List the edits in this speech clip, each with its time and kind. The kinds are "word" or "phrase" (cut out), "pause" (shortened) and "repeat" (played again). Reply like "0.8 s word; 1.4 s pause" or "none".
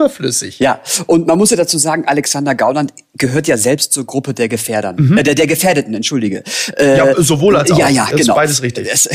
none